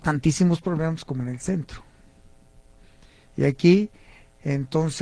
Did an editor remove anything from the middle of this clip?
no; 0 cuts

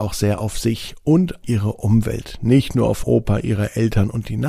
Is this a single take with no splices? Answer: no; 2 cuts; at 1.4 s, 3.0 s

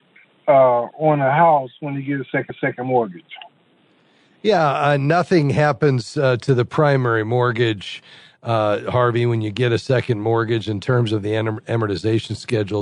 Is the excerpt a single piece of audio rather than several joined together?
no; 1 cut; at 2.5 s

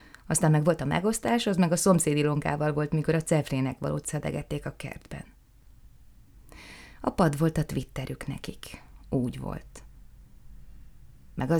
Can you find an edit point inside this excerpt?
no; 0 cuts

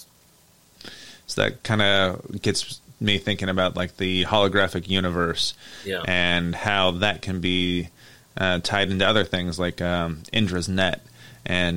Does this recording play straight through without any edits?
yes; 0 cuts

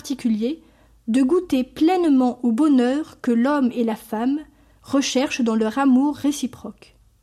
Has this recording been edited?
no; 0 cuts

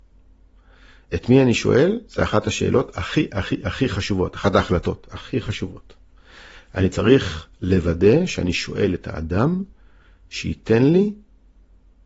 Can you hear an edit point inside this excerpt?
no; 0 cuts

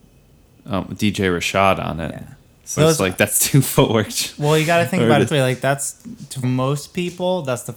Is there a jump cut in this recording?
yes; 3 cuts; at 2.8 s, 5.3 s, 6.4 s

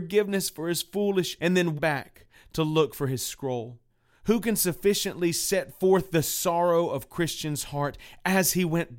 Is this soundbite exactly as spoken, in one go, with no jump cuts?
no; 3 cuts; at 1.4 s, 1.8 s, 3.9 s

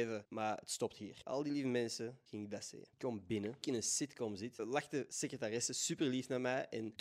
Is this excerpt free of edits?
no; 2 cuts; at 2.9 s, 3.6 s

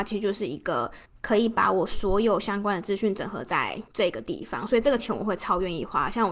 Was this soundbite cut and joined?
yes; 2 cuts; at 1.1 s, 3.9 s

